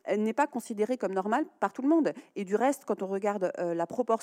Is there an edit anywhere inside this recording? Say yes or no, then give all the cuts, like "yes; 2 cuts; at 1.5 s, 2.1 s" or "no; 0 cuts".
no; 0 cuts